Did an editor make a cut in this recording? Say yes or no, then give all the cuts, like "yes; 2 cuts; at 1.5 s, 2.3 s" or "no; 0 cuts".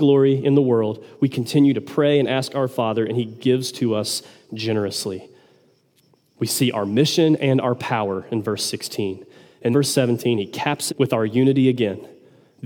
yes; 2 cuts; at 9.7 s, 10.9 s